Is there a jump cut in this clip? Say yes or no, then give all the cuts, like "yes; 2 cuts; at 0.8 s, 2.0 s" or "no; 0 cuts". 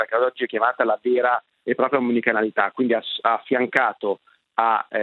no; 0 cuts